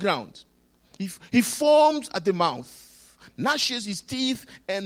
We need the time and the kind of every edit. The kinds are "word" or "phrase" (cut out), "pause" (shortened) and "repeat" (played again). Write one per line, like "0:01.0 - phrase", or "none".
none

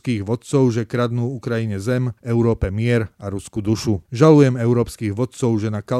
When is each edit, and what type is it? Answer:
0:02.2 - pause
0:04.0 - pause

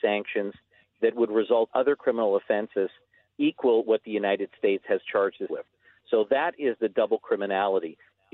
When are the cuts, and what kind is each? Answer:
0:01.7 - word
0:05.5 - word

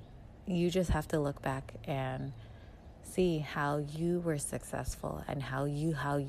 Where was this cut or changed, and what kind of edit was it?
none

